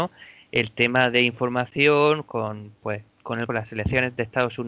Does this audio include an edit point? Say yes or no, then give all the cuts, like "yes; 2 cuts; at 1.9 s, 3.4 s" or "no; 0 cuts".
yes; 2 cuts; at 3.1 s, 3.5 s